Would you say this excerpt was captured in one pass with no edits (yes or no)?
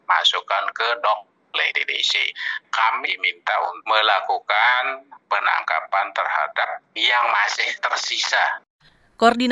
no